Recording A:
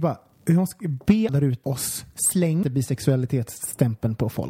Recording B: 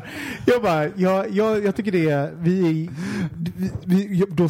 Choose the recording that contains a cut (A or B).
A